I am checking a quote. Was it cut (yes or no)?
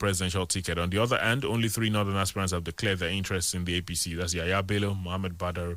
no